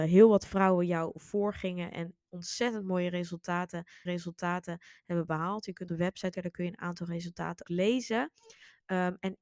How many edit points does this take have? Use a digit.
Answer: 4